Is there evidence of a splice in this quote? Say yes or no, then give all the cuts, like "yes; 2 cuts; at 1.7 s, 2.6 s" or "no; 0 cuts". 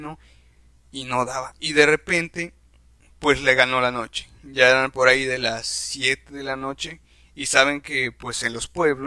no; 0 cuts